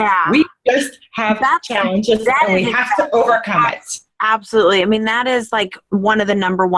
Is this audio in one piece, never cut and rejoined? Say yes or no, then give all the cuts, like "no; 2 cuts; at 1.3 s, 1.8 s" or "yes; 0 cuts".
yes; 0 cuts